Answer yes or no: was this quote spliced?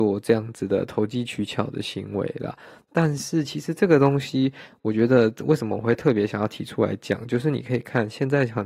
no